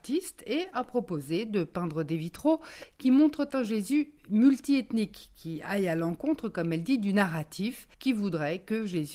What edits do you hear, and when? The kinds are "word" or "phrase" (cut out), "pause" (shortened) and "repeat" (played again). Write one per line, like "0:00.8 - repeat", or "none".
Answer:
0:07.9 - pause

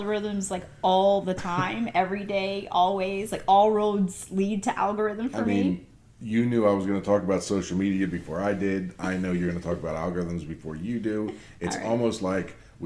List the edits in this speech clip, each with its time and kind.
none

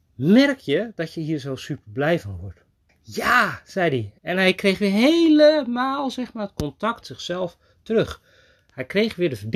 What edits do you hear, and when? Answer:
0:02.9 - pause
0:04.2 - pause
0:07.0 - word

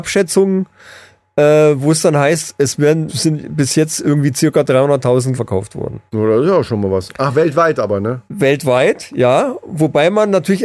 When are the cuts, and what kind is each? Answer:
0:03.1 - word
0:05.3 - word
0:06.1 - pause
0:08.3 - pause

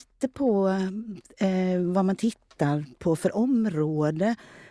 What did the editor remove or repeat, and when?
none

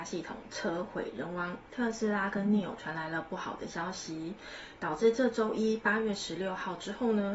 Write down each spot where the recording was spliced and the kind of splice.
0:01.7 - pause

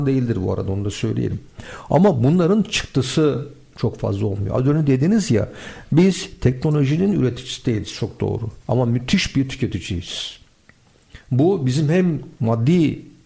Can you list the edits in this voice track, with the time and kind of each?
0:08.6 - pause
0:12.3 - pause

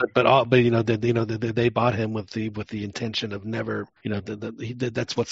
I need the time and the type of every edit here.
0:04.0 - pause

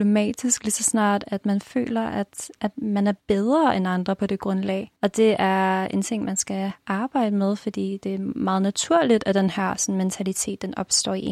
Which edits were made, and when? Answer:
0:03.2 - pause
0:05.0 - pause

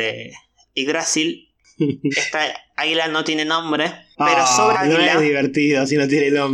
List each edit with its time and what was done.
0:02.1 - word
0:04.1 - pause
0:04.7 - word

